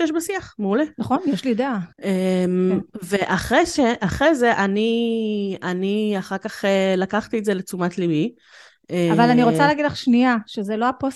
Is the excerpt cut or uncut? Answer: cut